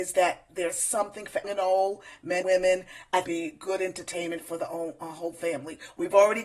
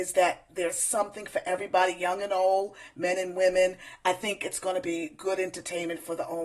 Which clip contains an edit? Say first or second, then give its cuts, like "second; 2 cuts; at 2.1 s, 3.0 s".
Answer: first; 3 cuts; at 1.4 s, 2.4 s, 3.2 s